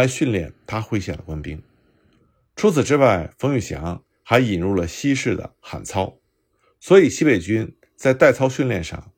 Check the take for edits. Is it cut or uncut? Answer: uncut